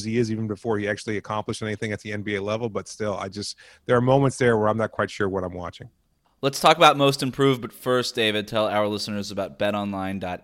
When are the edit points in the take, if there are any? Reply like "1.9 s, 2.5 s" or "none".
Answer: none